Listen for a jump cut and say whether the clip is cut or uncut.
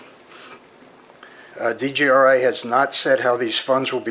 cut